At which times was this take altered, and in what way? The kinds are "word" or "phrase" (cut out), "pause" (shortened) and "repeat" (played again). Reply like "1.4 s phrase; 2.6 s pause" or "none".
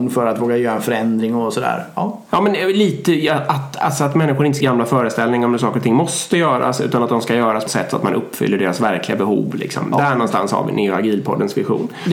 4.6 s phrase; 7.7 s phrase